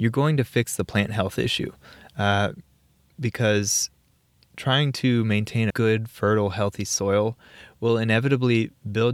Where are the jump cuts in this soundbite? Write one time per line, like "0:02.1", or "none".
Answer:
0:05.7